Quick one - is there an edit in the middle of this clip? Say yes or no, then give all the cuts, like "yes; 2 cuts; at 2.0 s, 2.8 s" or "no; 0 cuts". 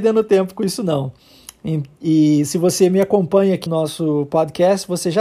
yes; 1 cut; at 3.7 s